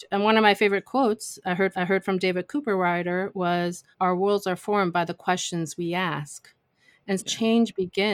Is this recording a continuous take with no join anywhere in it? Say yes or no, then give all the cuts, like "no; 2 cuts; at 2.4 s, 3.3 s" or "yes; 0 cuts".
no; 3 cuts; at 1.7 s, 3.9 s, 7.2 s